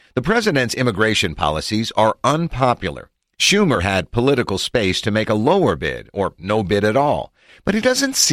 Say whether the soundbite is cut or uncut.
uncut